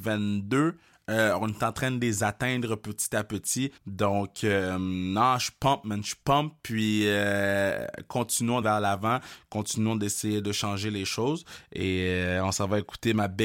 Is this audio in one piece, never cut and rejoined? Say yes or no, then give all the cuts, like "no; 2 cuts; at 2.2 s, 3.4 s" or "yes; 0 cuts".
no; 2 cuts; at 3.8 s, 8.6 s